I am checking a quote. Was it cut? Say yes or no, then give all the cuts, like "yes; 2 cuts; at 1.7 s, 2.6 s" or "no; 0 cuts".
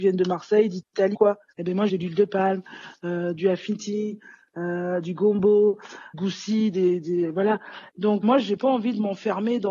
yes; 4 cuts; at 1.1 s, 1.9 s, 6.1 s, 8.2 s